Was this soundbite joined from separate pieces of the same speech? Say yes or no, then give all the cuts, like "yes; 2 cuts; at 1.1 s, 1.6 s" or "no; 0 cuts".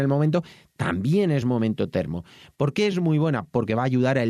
no; 0 cuts